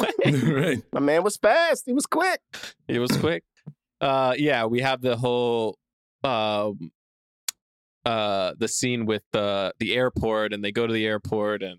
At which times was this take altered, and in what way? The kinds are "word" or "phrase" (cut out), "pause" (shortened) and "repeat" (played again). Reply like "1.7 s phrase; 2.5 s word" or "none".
none